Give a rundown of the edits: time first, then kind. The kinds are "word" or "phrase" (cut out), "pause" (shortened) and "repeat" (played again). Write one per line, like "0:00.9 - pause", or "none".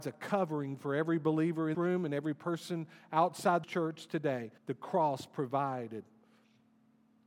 0:01.7 - word
0:03.6 - phrase
0:04.6 - pause